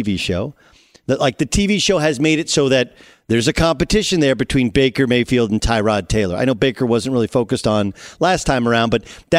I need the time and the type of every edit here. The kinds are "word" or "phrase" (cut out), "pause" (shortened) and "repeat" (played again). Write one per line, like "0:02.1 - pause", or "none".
none

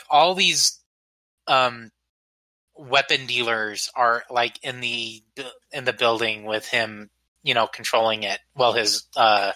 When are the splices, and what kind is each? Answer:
none

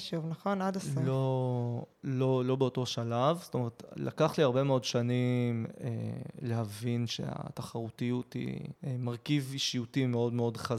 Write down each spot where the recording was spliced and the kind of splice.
0:01.9 - pause
0:08.8 - pause

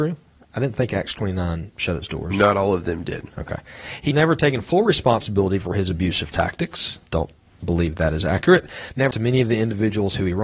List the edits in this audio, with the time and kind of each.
0:04.1 - word
0:07.1 - pause
0:09.1 - word

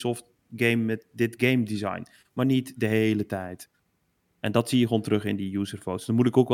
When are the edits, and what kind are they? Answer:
none

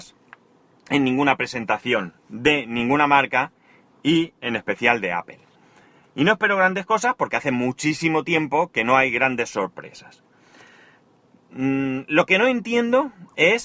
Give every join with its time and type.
none

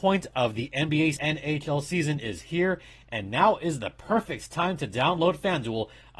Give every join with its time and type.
0:01.2 - phrase

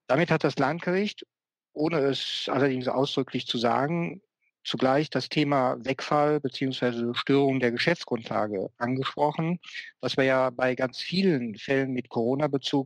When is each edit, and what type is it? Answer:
none

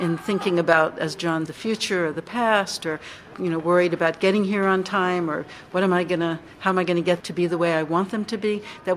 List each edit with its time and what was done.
0:01.5 - word
0:03.3 - word
0:07.2 - word

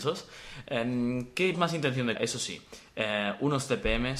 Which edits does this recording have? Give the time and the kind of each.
0:01.5 - word
0:02.2 - word

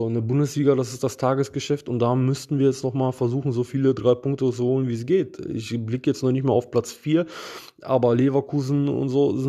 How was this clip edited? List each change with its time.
none

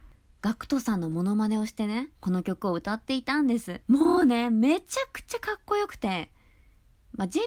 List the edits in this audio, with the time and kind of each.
0:02.1 - pause
0:03.8 - pause

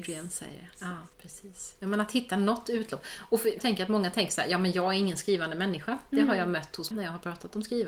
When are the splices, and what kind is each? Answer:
0:01.1 - pause
0:03.6 - word
0:06.9 - word

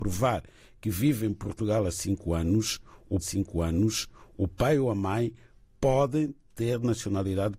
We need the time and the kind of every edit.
0:03.2 - repeat

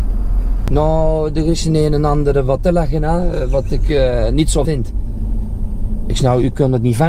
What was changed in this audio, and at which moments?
0:02.6 - word
0:04.6 - word

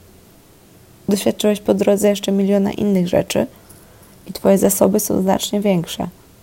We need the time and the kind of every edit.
none

